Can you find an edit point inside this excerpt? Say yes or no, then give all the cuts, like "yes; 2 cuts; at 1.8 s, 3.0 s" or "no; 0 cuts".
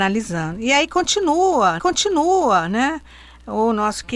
yes; 1 cut; at 1.8 s